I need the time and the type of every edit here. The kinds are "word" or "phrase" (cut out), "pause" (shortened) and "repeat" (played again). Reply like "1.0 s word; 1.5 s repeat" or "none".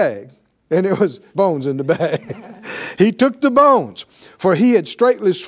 1.3 s word